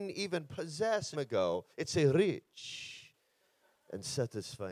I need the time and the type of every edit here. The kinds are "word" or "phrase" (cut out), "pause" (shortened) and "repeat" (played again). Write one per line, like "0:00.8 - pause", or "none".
0:01.1 - phrase
0:01.7 - pause